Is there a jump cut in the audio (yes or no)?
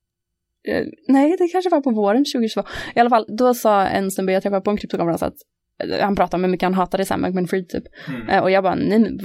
yes